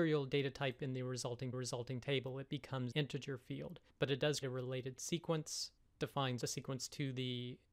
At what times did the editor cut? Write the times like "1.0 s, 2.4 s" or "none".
1.5 s, 2.9 s, 3.9 s, 4.4 s, 6.4 s